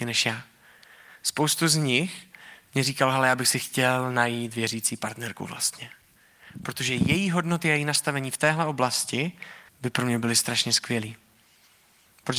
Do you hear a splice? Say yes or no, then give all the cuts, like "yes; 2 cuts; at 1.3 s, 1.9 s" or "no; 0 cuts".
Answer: yes; 1 cut; at 9.7 s